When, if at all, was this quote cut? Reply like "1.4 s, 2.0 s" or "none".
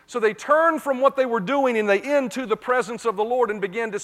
2.0 s